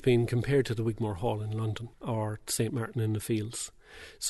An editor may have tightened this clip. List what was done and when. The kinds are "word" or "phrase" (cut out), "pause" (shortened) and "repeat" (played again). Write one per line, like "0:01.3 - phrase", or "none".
0:01.9 - pause